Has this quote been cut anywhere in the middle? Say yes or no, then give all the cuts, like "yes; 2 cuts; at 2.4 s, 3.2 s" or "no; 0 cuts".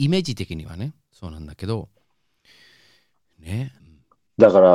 yes; 1 cut; at 3.8 s